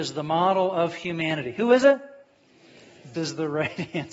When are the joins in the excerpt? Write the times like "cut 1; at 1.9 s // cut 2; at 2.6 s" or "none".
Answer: cut 1; at 3.1 s